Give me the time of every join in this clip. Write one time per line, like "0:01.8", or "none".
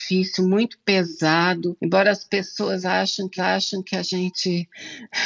0:03.4